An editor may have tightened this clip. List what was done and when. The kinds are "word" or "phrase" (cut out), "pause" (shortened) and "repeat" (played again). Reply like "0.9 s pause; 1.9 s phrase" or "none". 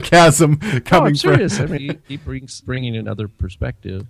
1.8 s word; 2.6 s word